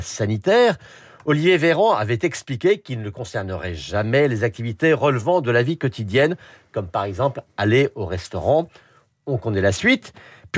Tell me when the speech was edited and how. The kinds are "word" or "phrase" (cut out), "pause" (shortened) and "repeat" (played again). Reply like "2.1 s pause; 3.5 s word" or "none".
none